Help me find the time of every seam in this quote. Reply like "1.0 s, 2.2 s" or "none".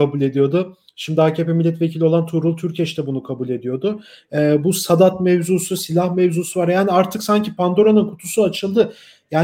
none